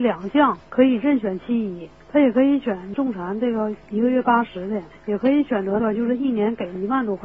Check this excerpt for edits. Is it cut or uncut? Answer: uncut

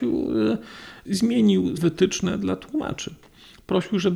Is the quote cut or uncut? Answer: cut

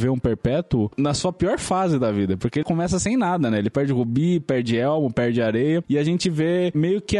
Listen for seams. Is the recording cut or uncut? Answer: cut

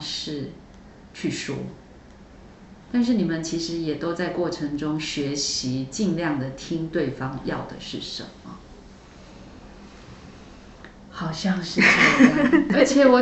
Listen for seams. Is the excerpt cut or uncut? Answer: cut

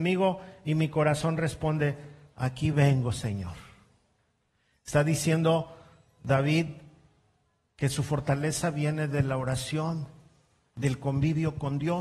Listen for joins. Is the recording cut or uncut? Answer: uncut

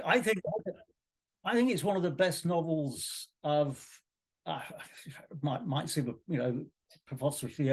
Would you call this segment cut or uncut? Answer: uncut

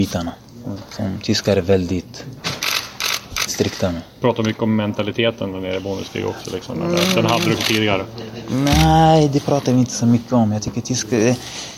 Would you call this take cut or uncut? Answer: cut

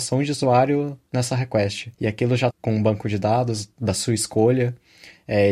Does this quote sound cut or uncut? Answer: cut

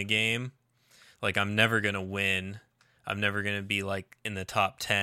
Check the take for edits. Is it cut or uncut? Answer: uncut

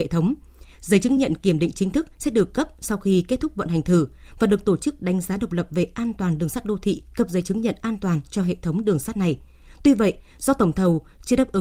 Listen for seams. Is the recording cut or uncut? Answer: uncut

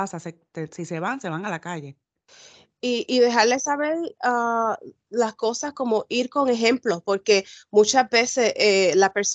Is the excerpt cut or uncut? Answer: uncut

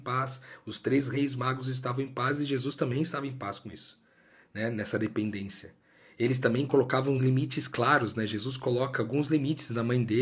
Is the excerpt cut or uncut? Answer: uncut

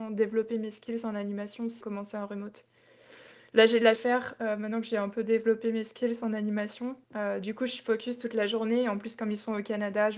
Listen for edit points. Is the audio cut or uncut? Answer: cut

